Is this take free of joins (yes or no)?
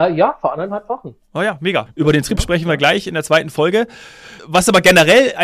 yes